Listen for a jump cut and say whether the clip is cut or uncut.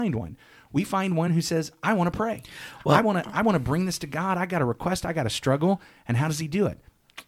uncut